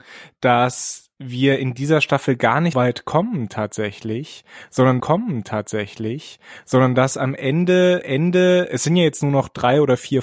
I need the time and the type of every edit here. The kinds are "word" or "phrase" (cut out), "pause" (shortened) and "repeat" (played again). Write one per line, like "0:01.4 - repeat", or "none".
0:02.7 - word
0:05.0 - repeat
0:08.0 - repeat